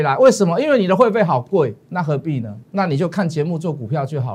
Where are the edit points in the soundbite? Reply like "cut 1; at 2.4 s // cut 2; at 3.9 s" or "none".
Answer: cut 1; at 1.8 s // cut 2; at 2.6 s